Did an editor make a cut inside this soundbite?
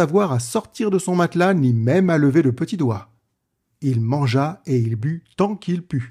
no; 0 cuts

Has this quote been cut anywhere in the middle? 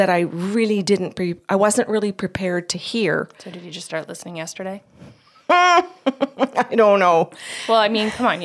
no; 0 cuts

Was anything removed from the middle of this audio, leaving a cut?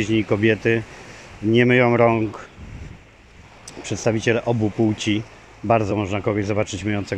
yes; 1 cut; at 5.9 s

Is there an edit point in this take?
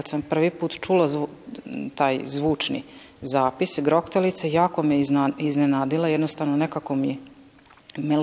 no; 0 cuts

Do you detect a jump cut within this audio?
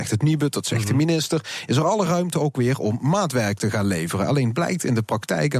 no; 0 cuts

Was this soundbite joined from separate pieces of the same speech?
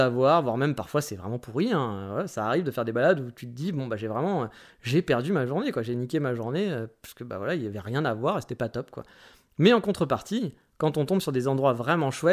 no; 0 cuts

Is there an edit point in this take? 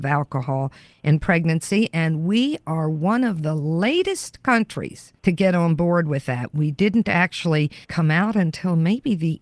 yes; 2 cuts; at 5.2 s, 7.8 s

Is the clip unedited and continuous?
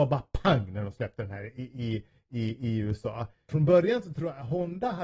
yes; 0 cuts

